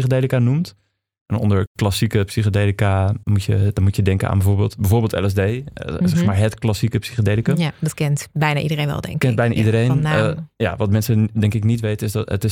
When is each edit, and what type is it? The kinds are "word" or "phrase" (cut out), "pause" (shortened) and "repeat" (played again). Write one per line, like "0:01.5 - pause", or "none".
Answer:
0:03.2 - word